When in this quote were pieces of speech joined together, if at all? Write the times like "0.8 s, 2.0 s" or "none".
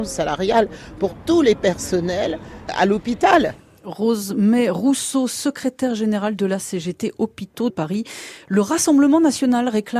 7.7 s